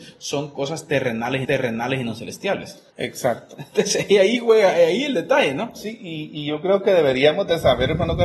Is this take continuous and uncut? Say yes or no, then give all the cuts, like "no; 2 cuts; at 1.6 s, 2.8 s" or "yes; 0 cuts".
no; 2 cuts; at 1.4 s, 2.9 s